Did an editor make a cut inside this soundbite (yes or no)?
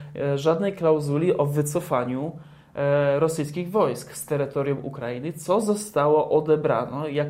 no